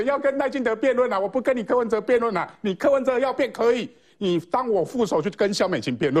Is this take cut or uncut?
uncut